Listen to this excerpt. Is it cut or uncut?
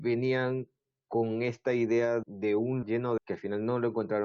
cut